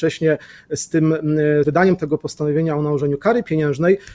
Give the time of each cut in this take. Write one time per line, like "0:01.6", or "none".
0:01.6